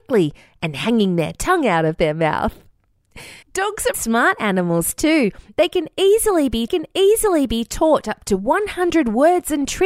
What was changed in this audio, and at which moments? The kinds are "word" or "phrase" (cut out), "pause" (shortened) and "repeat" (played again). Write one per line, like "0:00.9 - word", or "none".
0:03.4 - pause
0:03.9 - word
0:06.7 - repeat